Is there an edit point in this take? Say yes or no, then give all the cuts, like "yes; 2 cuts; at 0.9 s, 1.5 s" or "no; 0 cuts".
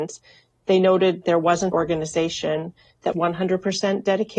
yes; 3 cuts; at 1.2 s, 1.7 s, 3.1 s